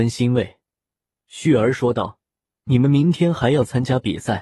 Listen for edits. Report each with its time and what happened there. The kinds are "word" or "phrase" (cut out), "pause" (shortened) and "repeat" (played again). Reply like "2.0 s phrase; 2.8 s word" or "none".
2.3 s pause